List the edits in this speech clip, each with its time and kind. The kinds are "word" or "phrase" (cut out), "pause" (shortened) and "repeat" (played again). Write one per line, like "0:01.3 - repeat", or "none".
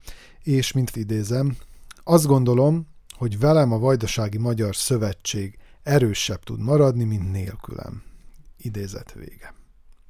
0:00.9 - word

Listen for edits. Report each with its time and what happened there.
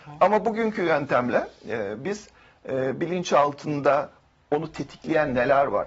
none

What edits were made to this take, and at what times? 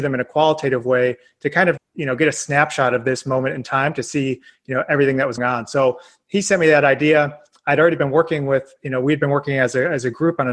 0:01.8 - word
0:05.4 - word

